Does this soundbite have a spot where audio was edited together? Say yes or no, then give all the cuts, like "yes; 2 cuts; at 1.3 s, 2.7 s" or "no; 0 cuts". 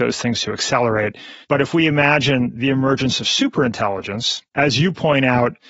yes; 2 cuts; at 1.4 s, 4.5 s